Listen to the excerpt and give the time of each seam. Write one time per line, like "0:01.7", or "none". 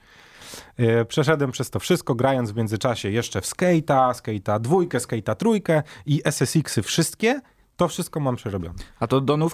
none